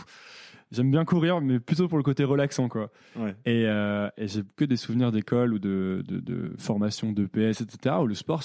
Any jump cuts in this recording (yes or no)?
no